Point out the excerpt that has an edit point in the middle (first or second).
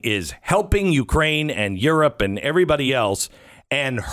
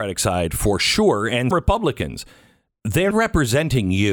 second